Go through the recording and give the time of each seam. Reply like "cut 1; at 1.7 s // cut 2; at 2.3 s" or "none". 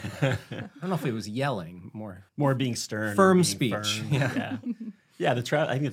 cut 1; at 2.3 s